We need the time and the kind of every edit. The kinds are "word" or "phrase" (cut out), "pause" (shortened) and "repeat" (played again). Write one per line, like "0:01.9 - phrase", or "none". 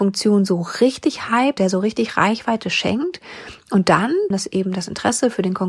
0:01.6 - word
0:04.3 - word